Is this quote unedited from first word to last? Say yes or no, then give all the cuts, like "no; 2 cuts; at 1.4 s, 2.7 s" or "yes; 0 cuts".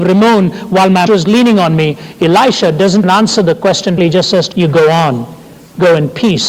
no; 4 cuts; at 1.1 s, 3.0 s, 4.0 s, 4.5 s